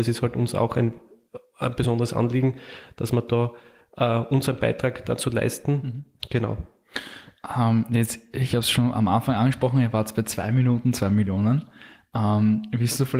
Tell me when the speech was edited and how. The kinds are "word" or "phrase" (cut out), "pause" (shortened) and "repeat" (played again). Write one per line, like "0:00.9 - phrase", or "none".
none